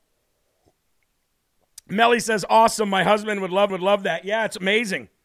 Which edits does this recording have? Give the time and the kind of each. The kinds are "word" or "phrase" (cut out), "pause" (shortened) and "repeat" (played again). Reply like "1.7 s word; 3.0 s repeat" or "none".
3.7 s repeat